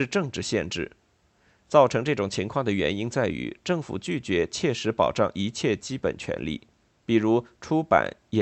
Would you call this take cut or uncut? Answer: uncut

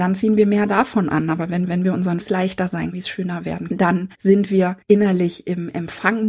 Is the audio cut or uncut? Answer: cut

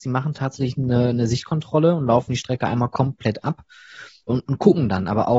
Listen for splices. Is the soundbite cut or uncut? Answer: cut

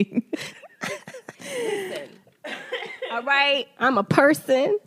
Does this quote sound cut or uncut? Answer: cut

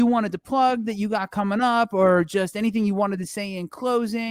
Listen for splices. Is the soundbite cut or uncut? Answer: uncut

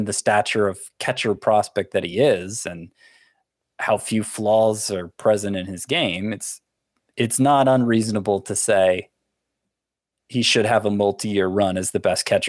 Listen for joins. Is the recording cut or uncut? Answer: uncut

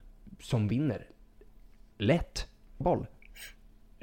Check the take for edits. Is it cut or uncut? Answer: cut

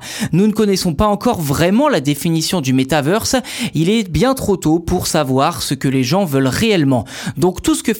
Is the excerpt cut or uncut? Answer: uncut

